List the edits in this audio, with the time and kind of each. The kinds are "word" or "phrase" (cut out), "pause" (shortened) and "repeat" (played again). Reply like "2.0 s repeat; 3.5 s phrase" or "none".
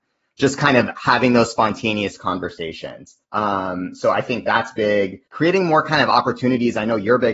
3.2 s pause; 5.3 s pause